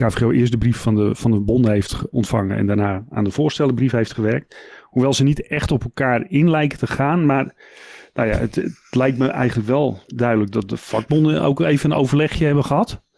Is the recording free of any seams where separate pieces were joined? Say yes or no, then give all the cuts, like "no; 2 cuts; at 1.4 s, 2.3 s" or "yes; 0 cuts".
no; 1 cut; at 2.1 s